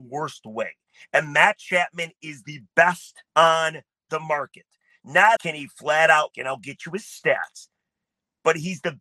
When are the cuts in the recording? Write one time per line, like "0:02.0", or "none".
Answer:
0:03.3
0:05.4
0:06.3